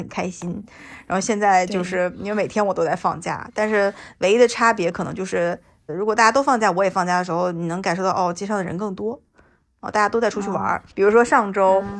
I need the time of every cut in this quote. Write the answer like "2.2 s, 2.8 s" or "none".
5.9 s, 10.9 s